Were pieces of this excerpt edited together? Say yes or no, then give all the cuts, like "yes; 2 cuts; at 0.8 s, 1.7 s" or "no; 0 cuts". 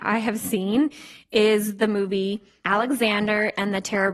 no; 0 cuts